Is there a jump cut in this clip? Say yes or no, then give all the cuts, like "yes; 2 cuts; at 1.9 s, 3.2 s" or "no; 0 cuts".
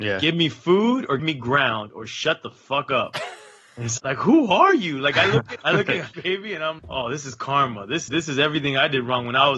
yes; 6 cuts; at 1.2 s, 4.0 s, 5.6 s, 6.1 s, 6.8 s, 8.1 s